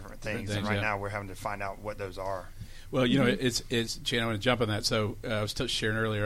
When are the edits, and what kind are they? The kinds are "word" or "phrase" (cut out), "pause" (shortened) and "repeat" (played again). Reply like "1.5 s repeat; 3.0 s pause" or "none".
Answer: none